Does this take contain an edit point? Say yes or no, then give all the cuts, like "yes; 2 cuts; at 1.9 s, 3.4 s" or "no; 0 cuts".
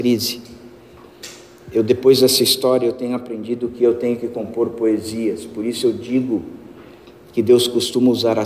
no; 0 cuts